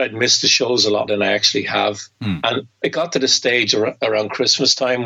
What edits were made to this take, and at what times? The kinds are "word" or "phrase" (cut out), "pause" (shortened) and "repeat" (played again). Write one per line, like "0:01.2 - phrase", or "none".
0:01.1 - word
0:02.8 - word